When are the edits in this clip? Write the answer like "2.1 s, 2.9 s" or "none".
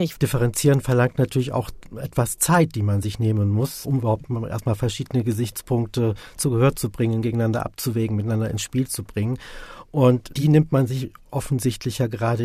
none